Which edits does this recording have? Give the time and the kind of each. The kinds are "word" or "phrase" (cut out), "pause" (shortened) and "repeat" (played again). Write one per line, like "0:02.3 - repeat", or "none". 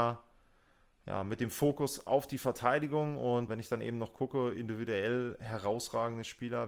0:03.5 - word